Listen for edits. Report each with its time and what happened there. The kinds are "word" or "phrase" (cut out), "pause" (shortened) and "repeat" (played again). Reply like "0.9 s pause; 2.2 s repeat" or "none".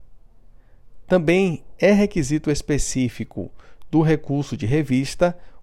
none